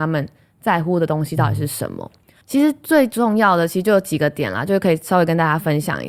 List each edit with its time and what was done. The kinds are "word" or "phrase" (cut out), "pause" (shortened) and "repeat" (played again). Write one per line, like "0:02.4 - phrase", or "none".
0:02.4 - pause